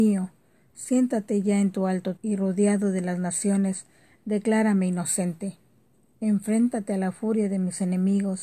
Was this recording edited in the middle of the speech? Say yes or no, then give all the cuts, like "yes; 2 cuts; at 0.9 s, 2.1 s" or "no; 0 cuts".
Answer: yes; 1 cut; at 2.2 s